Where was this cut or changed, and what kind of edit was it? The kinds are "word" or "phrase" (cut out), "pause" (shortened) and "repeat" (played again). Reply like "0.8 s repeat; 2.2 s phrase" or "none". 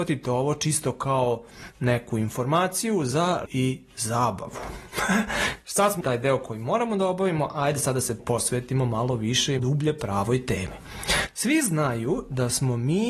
3.5 s word; 6.0 s word; 8.2 s word; 9.6 s word